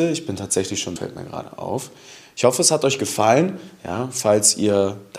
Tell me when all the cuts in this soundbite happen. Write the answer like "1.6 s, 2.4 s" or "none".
1.0 s